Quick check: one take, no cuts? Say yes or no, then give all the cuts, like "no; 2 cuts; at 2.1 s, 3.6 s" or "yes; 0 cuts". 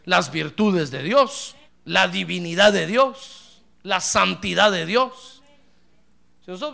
no; 1 cut; at 1.7 s